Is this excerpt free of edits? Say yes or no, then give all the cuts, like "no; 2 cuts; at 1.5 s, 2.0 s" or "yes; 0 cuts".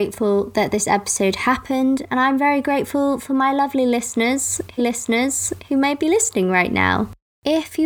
no; 1 cut; at 4.8 s